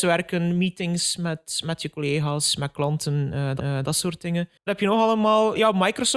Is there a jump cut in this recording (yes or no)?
yes